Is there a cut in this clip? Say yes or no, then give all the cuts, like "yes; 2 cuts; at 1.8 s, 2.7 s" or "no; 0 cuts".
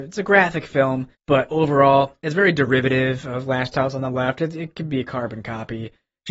yes; 1 cut; at 1.1 s